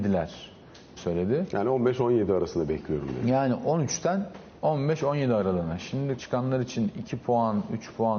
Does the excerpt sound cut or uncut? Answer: cut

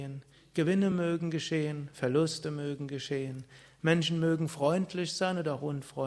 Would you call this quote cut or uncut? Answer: uncut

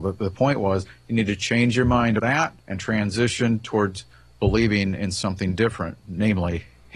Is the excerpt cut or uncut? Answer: cut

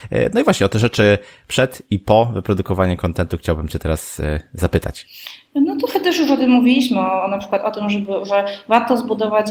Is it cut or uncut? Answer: uncut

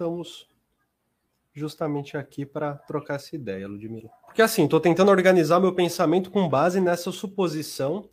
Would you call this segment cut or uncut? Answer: cut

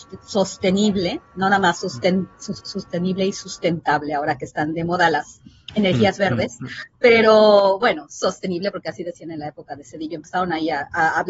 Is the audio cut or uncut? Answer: uncut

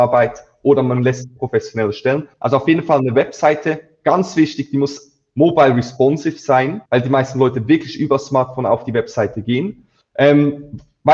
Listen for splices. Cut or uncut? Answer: cut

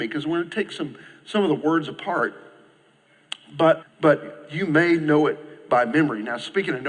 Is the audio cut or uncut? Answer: cut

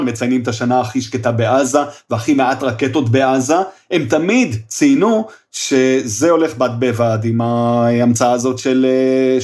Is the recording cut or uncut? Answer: uncut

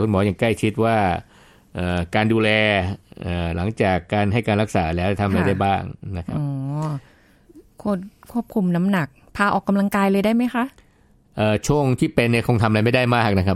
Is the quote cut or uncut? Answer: uncut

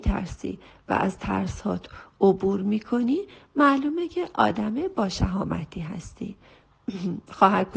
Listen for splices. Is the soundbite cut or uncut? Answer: uncut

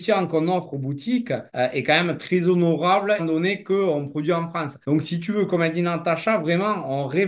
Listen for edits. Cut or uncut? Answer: cut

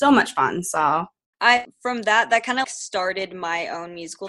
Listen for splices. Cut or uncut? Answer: cut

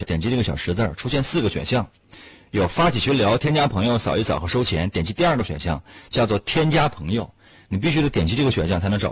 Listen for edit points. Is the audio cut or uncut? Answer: uncut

